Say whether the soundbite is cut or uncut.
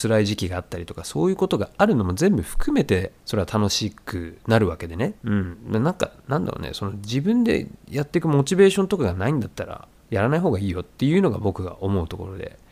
cut